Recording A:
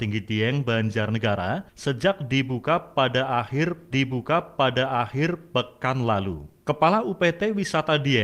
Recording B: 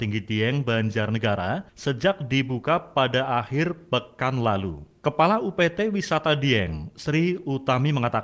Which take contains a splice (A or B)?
A